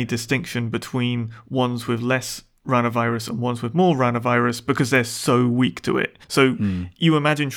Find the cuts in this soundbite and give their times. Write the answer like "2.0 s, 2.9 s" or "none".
6.2 s